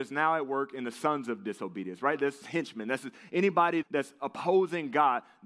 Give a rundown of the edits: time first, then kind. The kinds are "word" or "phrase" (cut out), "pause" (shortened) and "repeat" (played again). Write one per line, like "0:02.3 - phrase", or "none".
0:02.4 - word
0:03.8 - word